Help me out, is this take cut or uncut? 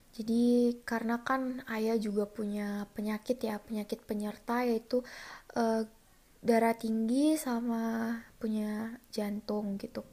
uncut